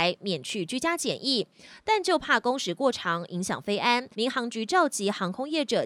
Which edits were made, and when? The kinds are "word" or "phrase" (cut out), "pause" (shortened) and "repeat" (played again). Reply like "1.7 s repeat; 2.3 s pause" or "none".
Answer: 4.1 s pause